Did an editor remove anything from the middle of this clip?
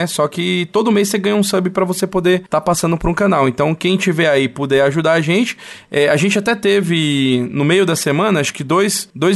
no; 0 cuts

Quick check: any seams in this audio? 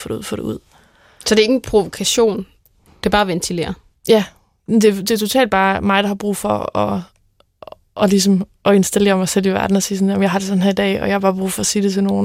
no; 0 cuts

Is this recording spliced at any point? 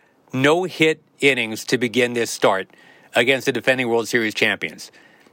no; 0 cuts

